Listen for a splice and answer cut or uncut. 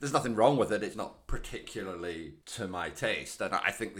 cut